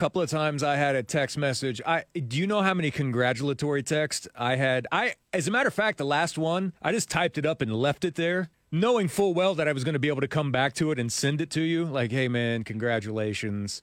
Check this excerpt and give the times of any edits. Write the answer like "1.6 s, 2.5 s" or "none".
6.8 s, 8.5 s